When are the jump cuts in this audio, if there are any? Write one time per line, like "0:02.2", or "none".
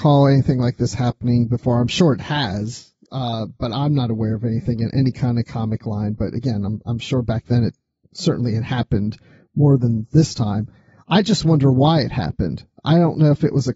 none